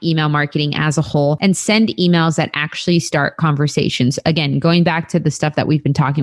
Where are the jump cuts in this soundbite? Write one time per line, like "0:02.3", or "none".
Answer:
none